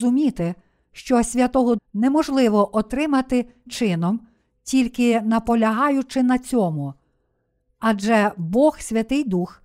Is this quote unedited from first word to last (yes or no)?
no